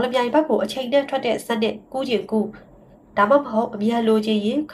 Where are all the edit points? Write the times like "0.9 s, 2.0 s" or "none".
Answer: none